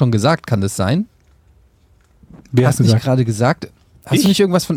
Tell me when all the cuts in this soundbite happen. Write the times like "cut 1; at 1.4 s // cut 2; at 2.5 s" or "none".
cut 1; at 2.8 s